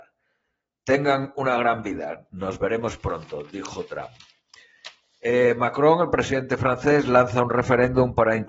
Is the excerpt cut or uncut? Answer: uncut